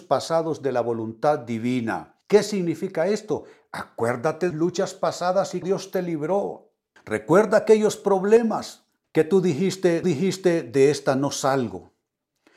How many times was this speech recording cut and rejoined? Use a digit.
6